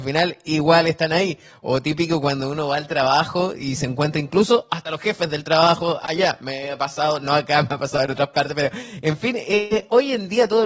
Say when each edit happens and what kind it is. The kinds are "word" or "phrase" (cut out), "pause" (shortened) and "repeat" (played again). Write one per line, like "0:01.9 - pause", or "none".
none